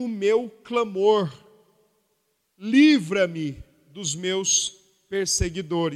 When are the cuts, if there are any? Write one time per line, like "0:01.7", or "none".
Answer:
none